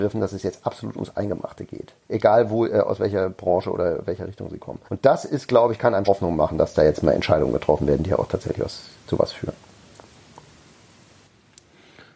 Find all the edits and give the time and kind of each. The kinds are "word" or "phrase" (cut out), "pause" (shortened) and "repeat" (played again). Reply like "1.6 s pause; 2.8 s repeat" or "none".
2.0 s pause; 4.9 s pause; 6.0 s word